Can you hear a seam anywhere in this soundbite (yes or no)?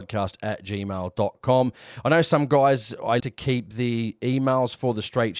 yes